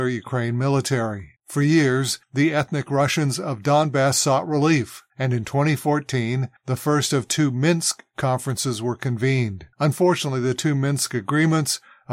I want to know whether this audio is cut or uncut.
cut